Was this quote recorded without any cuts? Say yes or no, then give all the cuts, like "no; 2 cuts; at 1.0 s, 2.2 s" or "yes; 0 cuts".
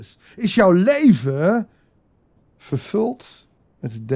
yes; 0 cuts